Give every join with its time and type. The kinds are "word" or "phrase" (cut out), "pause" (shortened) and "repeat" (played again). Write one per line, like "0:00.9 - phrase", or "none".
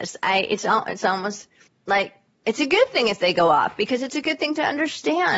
0:01.7 - pause